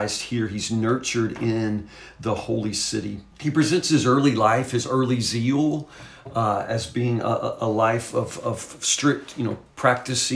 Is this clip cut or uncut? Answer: cut